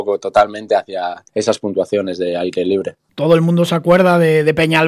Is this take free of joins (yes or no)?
no